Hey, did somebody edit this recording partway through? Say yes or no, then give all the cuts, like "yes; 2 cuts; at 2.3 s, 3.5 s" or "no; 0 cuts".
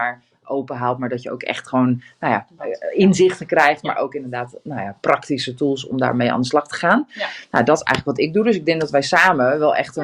no; 0 cuts